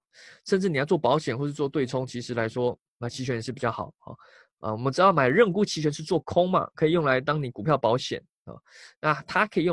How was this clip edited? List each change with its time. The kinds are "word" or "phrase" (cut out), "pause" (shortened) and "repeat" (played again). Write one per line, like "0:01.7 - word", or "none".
none